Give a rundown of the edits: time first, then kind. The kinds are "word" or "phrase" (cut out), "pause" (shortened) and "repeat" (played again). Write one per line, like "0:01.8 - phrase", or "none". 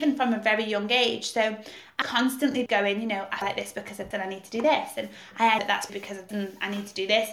0:02.0 - word
0:02.7 - word
0:03.4 - word
0:04.1 - word
0:05.6 - word
0:05.9 - word
0:06.3 - word